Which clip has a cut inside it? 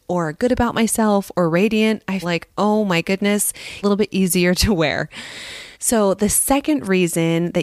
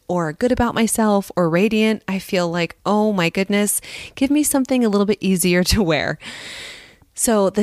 first; 3 cuts; at 2.2 s, 3.8 s, 5.7 s

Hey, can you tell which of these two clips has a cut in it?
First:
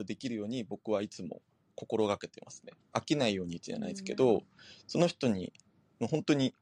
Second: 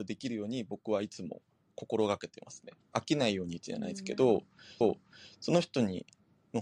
second; 1 cut; at 4.8 s

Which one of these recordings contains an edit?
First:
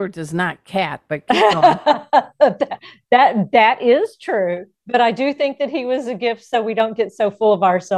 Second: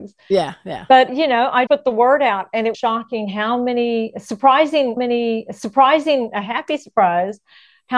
second; 4 cuts; at 1.1 s, 1.7 s, 2.7 s, 5.0 s

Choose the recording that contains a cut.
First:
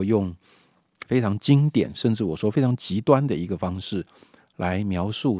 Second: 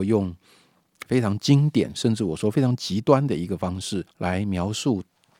second; 1 cut; at 4.1 s

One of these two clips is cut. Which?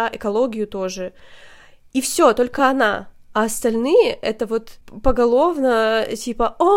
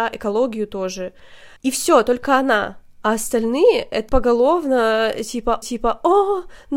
second; 3 cuts; at 1.6 s, 4.1 s, 5.6 s

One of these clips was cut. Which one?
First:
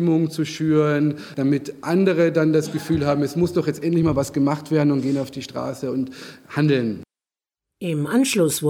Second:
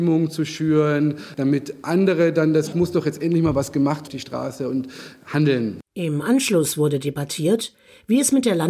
second; 3 cuts; at 2.7 s, 4.1 s, 5.9 s

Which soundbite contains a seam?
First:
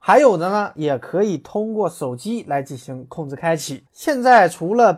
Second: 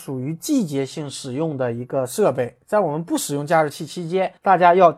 first; 1 cut; at 3.9 s

